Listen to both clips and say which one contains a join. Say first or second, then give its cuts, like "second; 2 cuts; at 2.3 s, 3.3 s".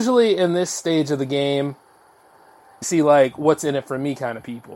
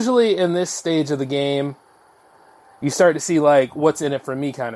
first; 1 cut; at 2.8 s